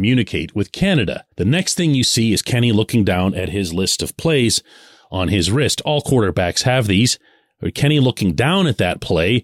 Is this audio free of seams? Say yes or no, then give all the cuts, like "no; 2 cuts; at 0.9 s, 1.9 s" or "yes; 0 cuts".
no; 1 cut; at 1.3 s